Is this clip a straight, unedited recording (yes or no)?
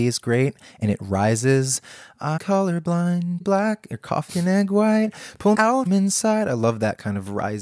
no